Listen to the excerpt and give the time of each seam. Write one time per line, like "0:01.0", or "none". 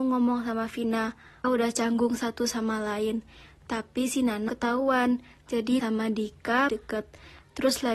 0:01.4
0:04.5
0:05.8
0:06.7